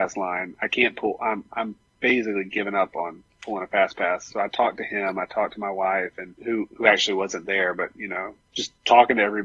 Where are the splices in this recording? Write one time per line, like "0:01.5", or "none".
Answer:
0:06.4